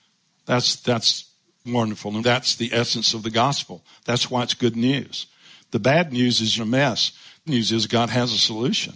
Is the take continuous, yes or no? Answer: no